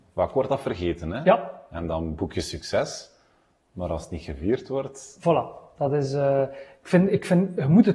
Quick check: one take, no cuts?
yes; 0 cuts

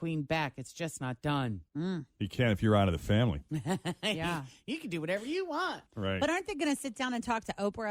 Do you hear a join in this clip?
yes; 2 cuts; at 1.7 s, 5.9 s

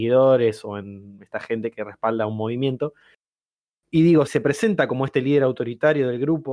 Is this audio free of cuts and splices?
no; 1 cut; at 4.3 s

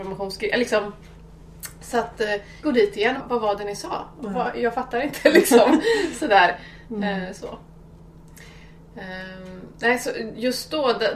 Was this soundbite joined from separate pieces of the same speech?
yes; 2 cuts; at 2.6 s, 3.2 s

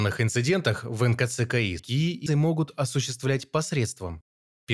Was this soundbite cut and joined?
yes; 2 cuts; at 1.8 s, 2.3 s

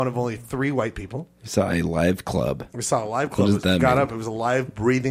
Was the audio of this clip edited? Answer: no; 0 cuts

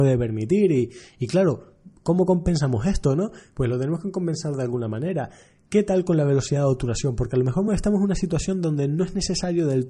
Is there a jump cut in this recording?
no; 0 cuts

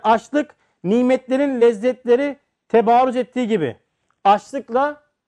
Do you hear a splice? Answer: no; 0 cuts

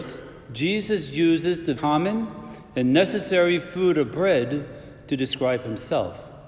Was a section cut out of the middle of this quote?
yes; 1 cut; at 1.8 s

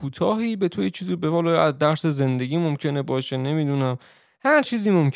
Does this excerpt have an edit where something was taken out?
no; 0 cuts

